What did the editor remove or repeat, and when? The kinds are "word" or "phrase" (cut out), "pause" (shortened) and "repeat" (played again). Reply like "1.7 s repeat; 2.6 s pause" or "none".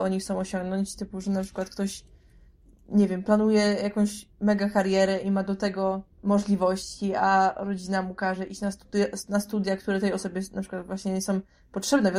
4.3 s pause; 6.1 s pause